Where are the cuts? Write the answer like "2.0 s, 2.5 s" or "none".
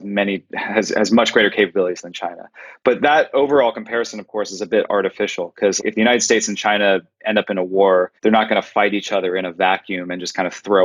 5.8 s, 8.2 s